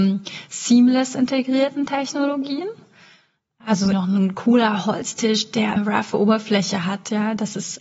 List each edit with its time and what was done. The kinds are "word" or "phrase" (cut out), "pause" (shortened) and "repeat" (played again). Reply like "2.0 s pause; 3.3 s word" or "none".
3.9 s word; 5.8 s word